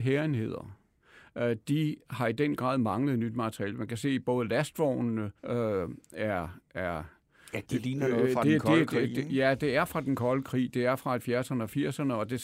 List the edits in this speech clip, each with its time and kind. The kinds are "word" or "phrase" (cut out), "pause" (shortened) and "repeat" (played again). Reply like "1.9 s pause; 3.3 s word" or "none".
5.4 s pause